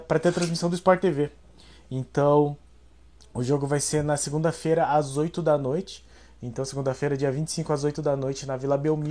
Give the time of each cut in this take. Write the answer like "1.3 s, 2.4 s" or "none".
none